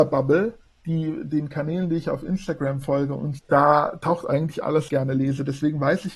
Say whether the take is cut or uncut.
cut